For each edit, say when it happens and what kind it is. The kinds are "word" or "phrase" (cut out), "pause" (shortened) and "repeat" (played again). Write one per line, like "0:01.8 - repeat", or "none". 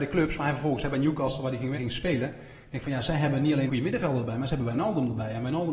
0:01.7 - word
0:03.7 - word